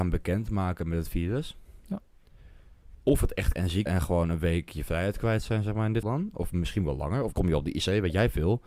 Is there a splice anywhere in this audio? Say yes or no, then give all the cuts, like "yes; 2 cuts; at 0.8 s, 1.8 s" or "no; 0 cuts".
yes; 4 cuts; at 3.6 s, 3.9 s, 6.0 s, 7.3 s